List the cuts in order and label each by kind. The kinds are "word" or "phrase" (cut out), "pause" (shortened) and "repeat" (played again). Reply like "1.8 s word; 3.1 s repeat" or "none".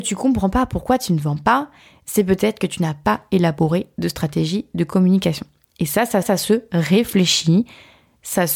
6.2 s repeat

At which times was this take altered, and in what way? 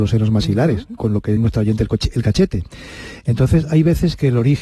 1.4 s word

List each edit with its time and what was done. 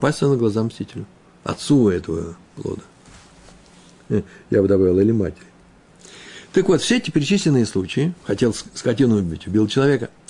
none

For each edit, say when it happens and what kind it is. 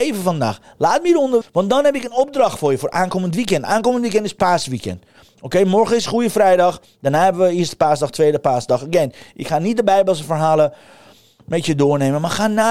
1.4 s word

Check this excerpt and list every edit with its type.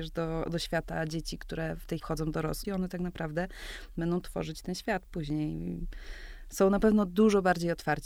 2.0 s word; 2.6 s phrase

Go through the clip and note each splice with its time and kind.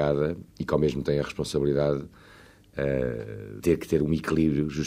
1.0 s word; 3.6 s word

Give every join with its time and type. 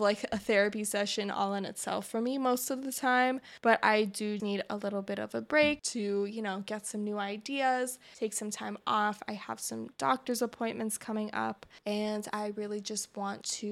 4.4 s word

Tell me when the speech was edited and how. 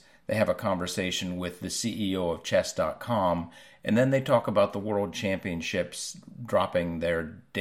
none

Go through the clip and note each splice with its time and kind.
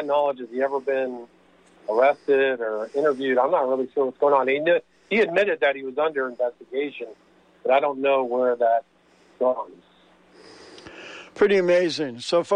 none

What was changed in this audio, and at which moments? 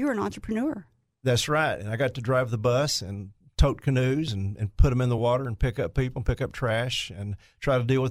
none

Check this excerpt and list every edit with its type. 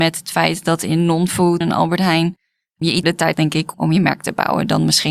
1.6 s word; 3.0 s word; 3.3 s word; 3.7 s word

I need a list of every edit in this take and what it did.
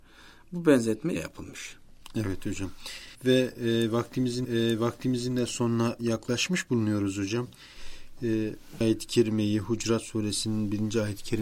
1.2 s phrase; 3.1 s pause; 4.4 s repeat; 8.8 s word

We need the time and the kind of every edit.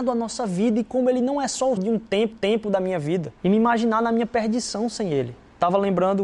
1.8 s word; 2.3 s repeat; 3.4 s pause

